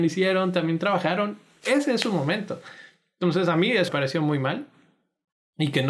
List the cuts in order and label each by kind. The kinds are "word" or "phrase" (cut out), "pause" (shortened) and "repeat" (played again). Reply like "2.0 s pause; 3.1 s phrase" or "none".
3.9 s word